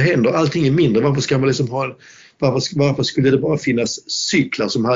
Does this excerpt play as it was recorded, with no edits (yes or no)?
yes